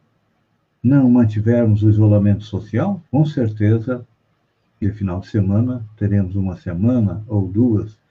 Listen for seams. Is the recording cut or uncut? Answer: cut